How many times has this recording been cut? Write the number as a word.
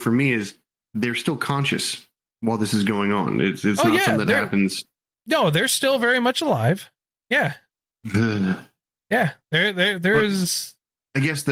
zero